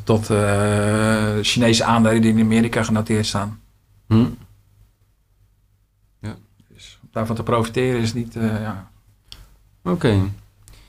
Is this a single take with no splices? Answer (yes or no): yes